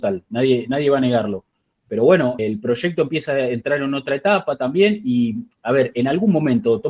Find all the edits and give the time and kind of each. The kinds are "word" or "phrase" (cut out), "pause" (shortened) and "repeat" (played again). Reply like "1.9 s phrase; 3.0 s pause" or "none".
2.4 s word